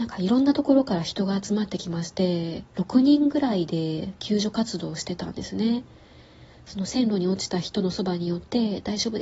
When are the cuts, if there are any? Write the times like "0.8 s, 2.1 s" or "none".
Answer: 2.7 s